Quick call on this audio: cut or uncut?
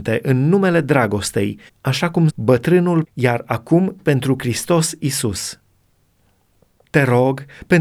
cut